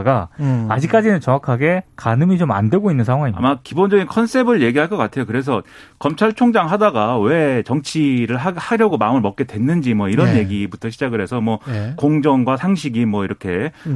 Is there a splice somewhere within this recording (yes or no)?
no